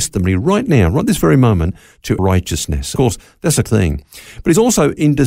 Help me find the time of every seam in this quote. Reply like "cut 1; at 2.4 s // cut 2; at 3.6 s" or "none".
cut 1; at 2.2 s // cut 2; at 3.0 s // cut 3; at 3.7 s